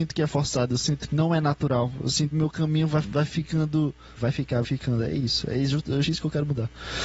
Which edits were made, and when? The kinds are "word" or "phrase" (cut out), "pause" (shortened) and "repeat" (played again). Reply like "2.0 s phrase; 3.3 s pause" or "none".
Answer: 1.1 s word; 2.3 s word; 3.0 s word; 4.2 s word; 4.6 s word; 6.0 s word